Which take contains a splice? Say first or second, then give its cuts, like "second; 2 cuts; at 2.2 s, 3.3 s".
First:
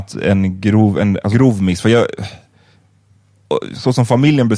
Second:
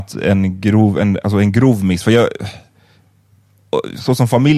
first; 1 cut; at 1.3 s